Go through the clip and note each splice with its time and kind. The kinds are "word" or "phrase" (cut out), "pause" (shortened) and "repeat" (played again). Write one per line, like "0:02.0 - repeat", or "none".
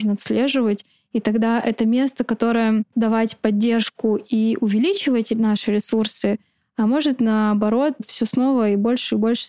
0:02.9 - word